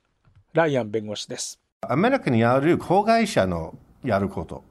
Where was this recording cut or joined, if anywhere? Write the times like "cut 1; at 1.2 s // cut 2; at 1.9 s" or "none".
cut 1; at 1.7 s